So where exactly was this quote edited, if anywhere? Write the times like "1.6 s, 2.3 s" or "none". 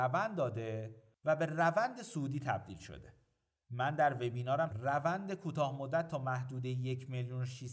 4.7 s